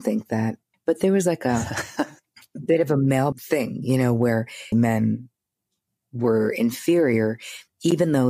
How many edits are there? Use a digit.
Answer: 2